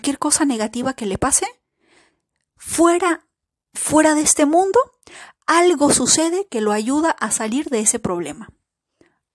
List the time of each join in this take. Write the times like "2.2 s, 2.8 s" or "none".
none